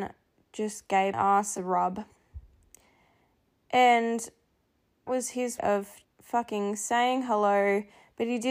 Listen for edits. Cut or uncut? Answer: cut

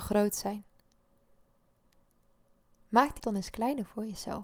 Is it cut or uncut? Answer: cut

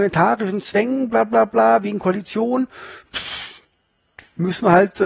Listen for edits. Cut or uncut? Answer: uncut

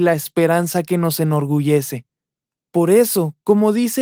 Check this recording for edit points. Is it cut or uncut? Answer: uncut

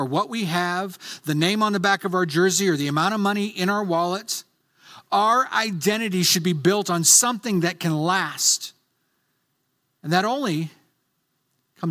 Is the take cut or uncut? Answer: uncut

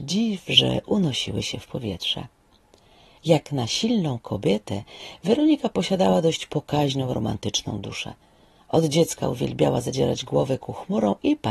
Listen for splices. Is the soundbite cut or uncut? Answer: uncut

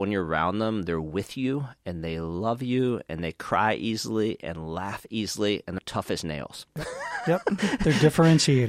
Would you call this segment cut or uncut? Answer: cut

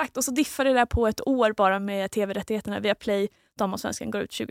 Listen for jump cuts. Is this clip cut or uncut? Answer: uncut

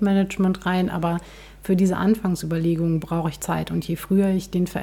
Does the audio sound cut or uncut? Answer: uncut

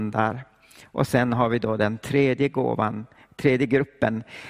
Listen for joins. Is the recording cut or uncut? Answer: uncut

